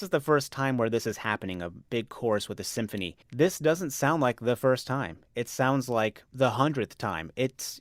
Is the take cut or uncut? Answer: cut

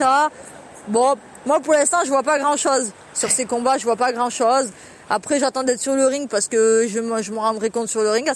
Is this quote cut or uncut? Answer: uncut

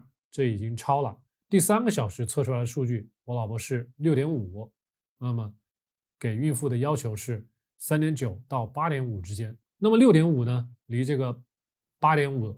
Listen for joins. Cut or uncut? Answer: uncut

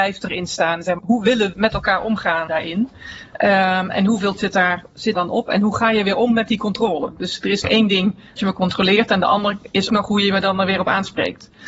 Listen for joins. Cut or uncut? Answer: cut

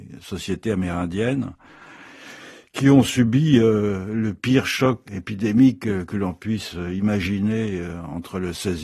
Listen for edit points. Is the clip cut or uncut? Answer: cut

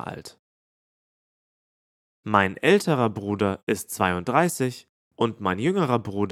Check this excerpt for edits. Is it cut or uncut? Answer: uncut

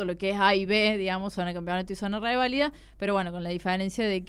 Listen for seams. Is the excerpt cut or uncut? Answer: uncut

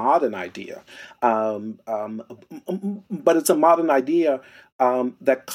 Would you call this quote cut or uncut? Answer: uncut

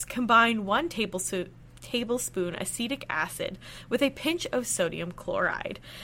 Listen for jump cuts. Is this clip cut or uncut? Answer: uncut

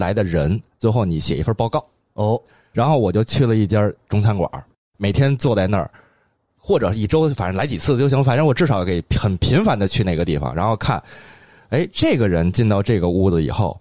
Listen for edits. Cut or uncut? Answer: uncut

